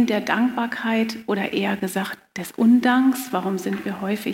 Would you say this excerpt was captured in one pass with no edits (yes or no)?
yes